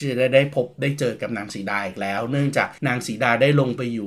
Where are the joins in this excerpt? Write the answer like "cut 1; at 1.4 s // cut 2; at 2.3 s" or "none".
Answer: cut 1; at 2.8 s